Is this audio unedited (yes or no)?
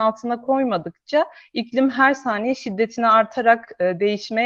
yes